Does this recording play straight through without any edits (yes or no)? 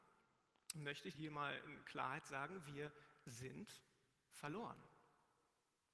no